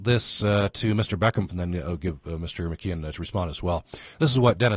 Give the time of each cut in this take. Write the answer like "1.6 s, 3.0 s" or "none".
1.5 s, 3.1 s